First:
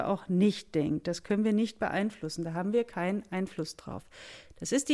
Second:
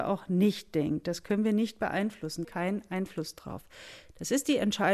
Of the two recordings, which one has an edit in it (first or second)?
second